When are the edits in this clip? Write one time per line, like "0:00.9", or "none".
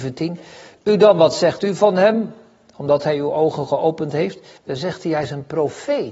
0:04.6